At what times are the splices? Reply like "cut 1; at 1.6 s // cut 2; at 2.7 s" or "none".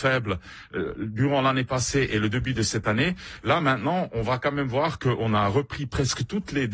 none